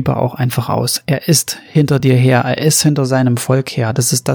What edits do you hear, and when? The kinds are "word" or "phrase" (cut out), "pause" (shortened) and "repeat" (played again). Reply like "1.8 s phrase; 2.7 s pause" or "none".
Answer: none